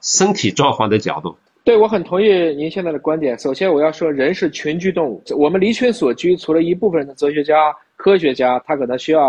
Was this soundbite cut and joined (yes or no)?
yes